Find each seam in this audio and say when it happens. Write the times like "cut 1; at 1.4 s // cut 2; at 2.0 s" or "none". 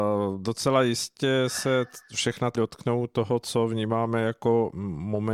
cut 1; at 2.5 s

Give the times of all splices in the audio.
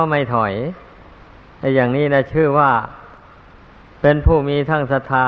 none

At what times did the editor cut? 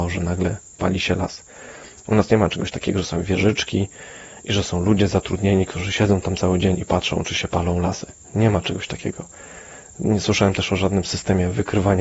none

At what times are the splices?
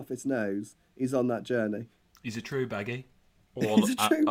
none

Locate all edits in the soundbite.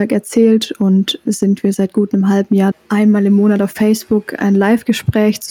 cut 1; at 1.2 s // cut 2; at 2.7 s

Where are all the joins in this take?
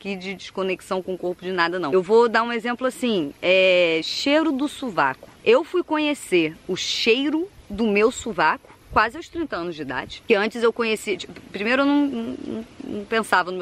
cut 1; at 8.8 s

